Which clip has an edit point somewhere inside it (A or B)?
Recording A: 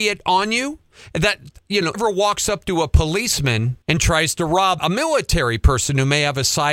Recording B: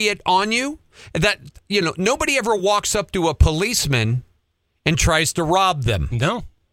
A